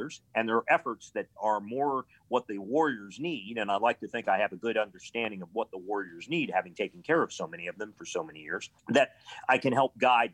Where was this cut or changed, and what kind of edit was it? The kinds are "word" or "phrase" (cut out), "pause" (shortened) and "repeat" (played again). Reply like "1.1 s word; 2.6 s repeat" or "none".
8.8 s pause